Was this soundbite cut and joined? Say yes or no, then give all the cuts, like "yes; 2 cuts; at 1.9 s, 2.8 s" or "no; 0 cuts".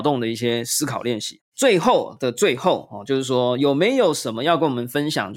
yes; 1 cut; at 1.4 s